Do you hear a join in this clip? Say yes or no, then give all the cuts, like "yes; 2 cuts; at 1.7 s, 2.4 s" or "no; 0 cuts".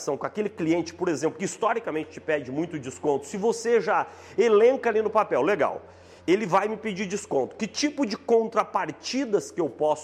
yes; 1 cut; at 6.2 s